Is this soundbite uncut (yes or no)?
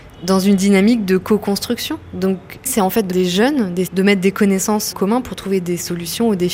no